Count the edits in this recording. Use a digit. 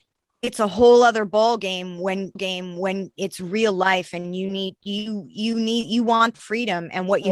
2